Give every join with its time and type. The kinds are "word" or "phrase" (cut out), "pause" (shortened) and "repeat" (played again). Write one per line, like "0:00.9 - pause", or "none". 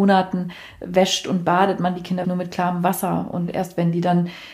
0:02.2 - word